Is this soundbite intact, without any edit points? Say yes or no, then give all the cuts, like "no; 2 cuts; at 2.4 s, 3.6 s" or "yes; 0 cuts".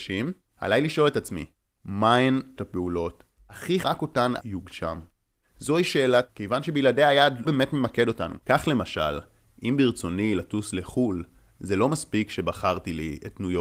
no; 6 cuts; at 2.6 s, 3.8 s, 4.4 s, 6.3 s, 7.4 s, 8.4 s